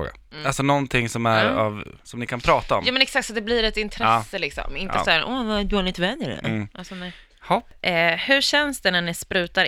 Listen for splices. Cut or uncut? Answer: uncut